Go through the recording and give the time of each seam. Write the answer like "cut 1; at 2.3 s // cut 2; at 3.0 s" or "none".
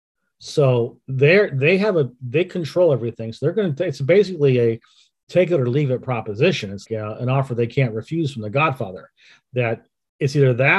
cut 1; at 6.9 s

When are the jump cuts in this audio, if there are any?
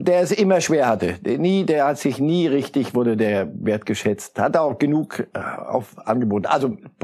none

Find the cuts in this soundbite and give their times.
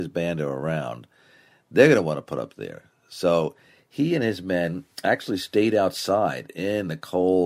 none

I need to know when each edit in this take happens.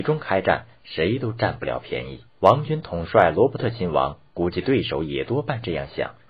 cut 1; at 2.3 s

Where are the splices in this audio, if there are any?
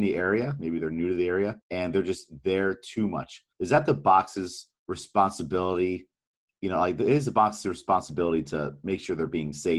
cut 1; at 1.6 s // cut 2; at 3.5 s // cut 3; at 4.8 s

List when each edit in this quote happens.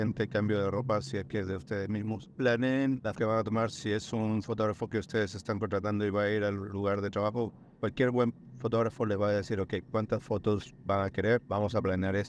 cut 1; at 3.1 s

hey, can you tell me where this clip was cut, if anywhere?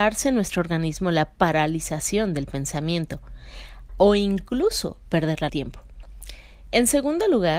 cut 1; at 3.9 s // cut 2; at 5.5 s

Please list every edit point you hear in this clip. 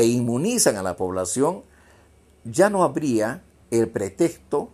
none

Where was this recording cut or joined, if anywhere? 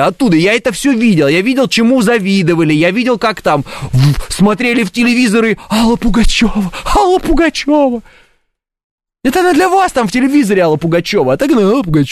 none

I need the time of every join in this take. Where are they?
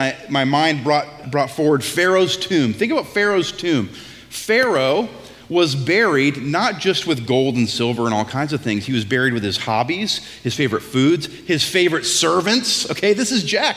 cut 1; at 1.2 s

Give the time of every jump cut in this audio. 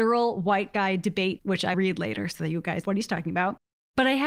cut 1; at 1.4 s // cut 2; at 1.7 s // cut 3; at 2.8 s

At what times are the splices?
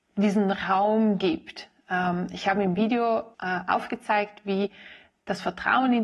cut 1; at 3.3 s

